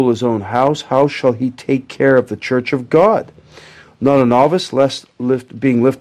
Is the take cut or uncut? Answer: uncut